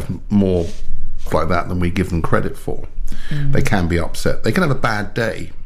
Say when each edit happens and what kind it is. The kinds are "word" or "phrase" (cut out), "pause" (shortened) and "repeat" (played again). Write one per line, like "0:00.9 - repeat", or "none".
0:01.3 - word